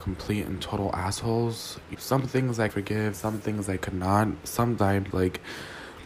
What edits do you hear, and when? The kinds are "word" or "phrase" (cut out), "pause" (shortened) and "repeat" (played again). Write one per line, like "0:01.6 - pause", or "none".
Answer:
0:01.9 - word
0:02.7 - word
0:03.1 - word
0:04.8 - word
0:05.1 - word

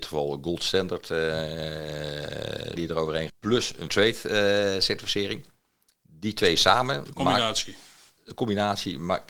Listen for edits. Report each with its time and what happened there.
0:02.8 - word
0:03.3 - word
0:03.9 - phrase

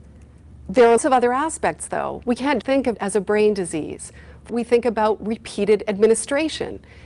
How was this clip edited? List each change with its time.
0:01.0 - word
0:02.6 - word
0:02.9 - word
0:04.5 - word

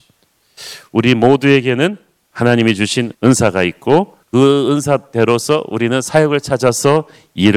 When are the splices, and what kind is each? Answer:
0:03.1 - pause
0:04.2 - pause

